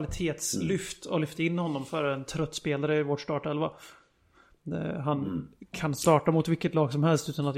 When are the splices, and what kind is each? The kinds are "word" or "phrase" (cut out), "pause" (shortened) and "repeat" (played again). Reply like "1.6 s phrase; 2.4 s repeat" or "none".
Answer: none